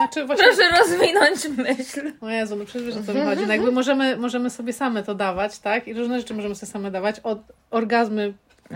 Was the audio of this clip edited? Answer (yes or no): no